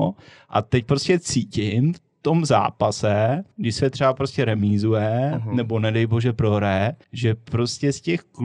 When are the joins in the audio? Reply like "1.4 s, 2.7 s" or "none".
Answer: 3.5 s, 7.0 s